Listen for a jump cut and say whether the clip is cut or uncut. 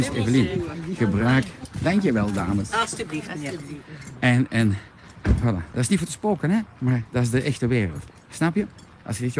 uncut